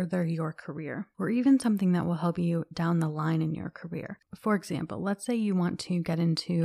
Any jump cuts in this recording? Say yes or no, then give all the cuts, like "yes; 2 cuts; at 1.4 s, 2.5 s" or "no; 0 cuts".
no; 0 cuts